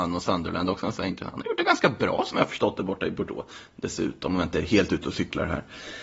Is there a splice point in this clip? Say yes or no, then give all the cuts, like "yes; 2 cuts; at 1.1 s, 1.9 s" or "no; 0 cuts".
no; 0 cuts